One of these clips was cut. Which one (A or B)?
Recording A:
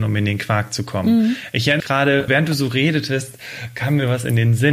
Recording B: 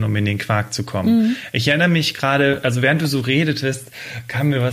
A